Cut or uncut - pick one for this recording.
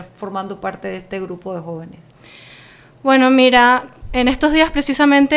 uncut